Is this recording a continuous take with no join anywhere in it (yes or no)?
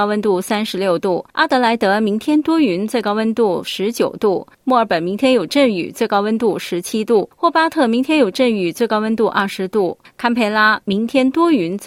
no